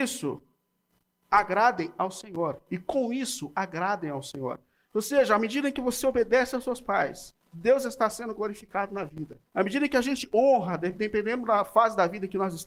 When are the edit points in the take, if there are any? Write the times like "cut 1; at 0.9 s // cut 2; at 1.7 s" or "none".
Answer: cut 1; at 7.4 s // cut 2; at 9.5 s